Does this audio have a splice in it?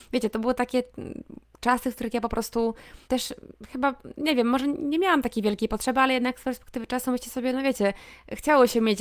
yes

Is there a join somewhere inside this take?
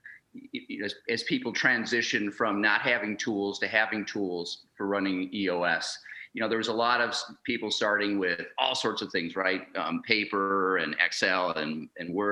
no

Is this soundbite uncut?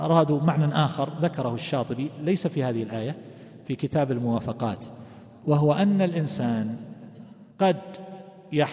no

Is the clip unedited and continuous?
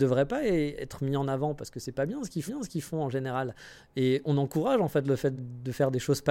no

